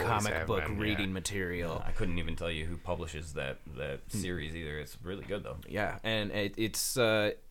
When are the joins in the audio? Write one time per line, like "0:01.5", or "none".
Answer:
none